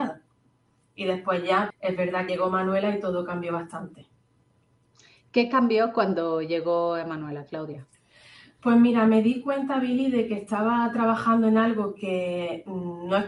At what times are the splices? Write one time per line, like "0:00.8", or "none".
0:01.7
0:02.3